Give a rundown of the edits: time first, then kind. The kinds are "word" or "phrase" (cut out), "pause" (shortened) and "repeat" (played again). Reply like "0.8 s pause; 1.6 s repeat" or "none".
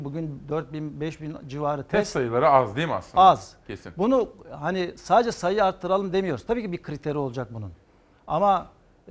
none